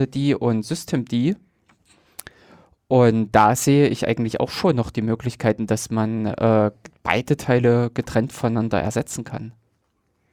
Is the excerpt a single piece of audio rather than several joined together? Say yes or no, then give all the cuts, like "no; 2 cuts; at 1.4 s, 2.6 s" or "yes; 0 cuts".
yes; 0 cuts